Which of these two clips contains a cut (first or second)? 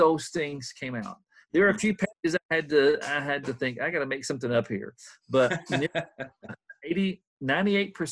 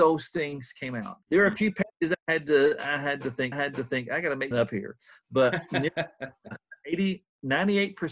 second